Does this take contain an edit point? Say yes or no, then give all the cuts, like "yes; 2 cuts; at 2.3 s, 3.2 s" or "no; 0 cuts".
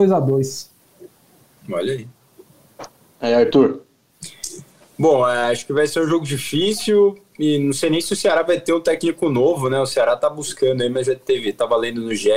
no; 0 cuts